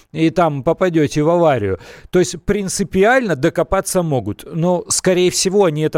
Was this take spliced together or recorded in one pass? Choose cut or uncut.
uncut